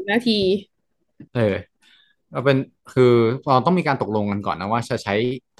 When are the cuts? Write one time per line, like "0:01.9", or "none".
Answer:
0:01.3